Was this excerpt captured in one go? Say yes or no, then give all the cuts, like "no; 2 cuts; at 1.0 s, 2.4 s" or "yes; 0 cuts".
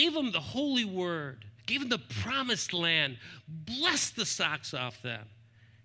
no; 1 cut; at 1.6 s